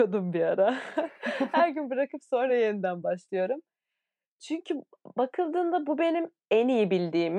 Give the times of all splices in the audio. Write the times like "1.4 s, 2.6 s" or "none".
none

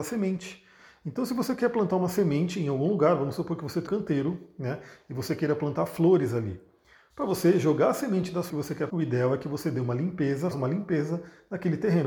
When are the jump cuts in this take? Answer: 3.9 s, 8.5 s, 8.9 s, 10.5 s

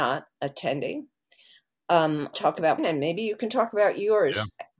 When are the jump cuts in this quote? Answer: 2.3 s, 2.8 s

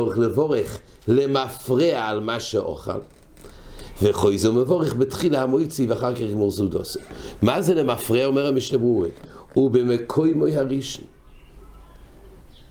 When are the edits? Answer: none

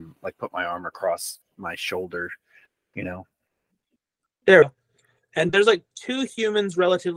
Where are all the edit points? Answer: 1.4 s, 4.6 s, 5.5 s, 5.9 s

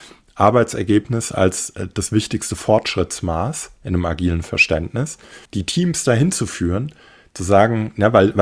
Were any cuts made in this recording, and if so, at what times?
5.5 s

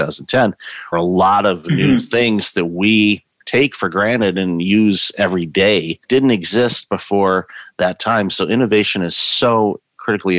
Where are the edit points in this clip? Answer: 0.9 s, 6.0 s

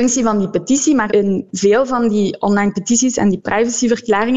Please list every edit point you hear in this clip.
1.1 s

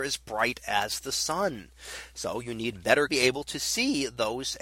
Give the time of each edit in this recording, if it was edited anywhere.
3.1 s

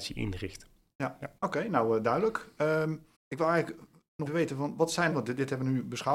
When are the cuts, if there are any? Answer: 1.4 s, 3.1 s, 4.3 s, 5.1 s

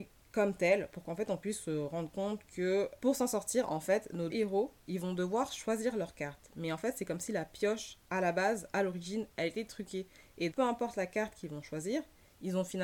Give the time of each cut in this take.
4.3 s, 8.0 s, 10.5 s

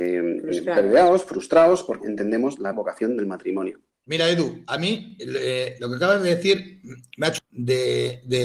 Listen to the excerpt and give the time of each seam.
2.0 s, 2.7 s, 7.4 s

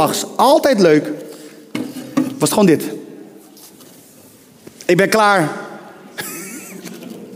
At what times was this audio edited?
none

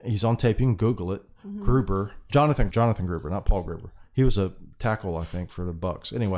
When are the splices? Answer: 2.7 s

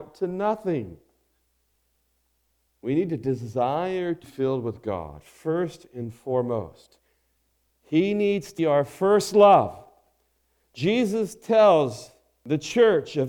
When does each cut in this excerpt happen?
4.2 s, 8.6 s

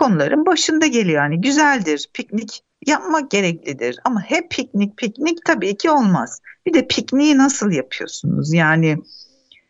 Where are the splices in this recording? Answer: 2.7 s

